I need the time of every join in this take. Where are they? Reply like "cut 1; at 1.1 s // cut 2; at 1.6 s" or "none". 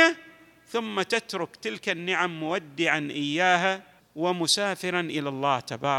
cut 1; at 4.0 s

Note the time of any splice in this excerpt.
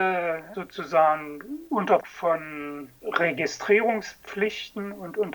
cut 1; at 2.0 s

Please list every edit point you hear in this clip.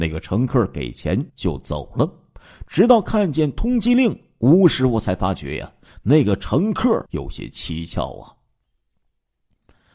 cut 1; at 1.3 s // cut 2; at 7.1 s

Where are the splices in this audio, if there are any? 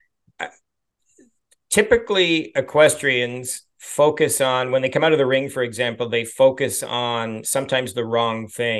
none

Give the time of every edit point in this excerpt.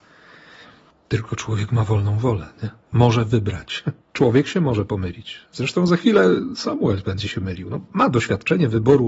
cut 1; at 2.8 s // cut 2; at 4.0 s

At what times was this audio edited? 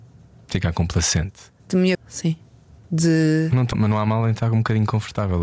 cut 1; at 1.6 s // cut 2; at 1.9 s // cut 3; at 3.7 s

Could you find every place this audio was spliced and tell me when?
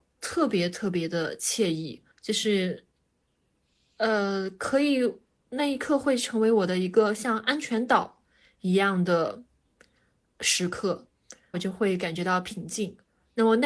cut 1; at 2.1 s // cut 2; at 11.5 s

